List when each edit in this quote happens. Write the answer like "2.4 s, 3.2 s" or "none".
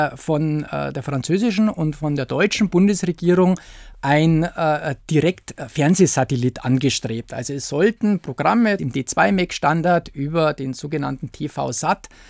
8.8 s